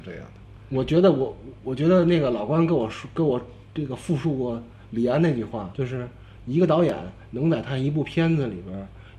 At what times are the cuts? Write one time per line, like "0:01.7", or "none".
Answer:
0:05.7